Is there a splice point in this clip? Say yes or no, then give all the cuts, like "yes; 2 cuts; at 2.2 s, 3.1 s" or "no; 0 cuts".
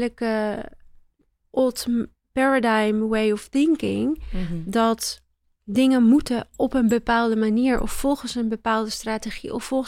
no; 0 cuts